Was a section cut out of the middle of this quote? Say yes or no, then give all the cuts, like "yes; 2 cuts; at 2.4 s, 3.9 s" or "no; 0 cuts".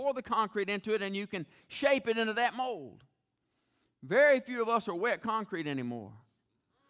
no; 0 cuts